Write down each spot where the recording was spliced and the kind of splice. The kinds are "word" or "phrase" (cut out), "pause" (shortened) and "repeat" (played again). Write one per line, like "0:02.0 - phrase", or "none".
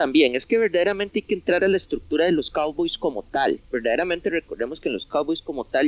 0:03.6 - pause